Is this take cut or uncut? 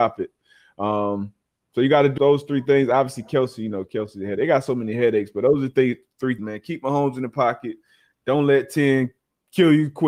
cut